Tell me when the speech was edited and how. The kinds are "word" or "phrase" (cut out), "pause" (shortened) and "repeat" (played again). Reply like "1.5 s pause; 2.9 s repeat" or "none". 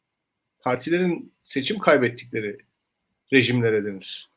none